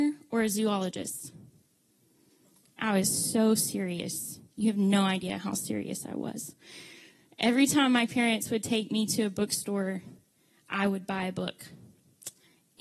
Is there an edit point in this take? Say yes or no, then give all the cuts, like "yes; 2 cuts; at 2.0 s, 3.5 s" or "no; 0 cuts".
no; 0 cuts